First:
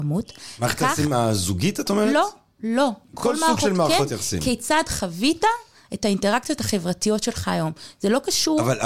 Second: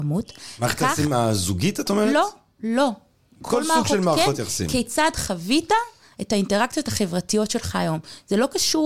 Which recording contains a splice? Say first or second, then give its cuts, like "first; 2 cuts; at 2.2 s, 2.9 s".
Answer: first; 1 cut; at 3.0 s